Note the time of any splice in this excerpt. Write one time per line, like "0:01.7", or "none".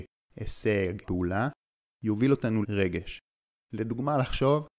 0:01.0
0:02.6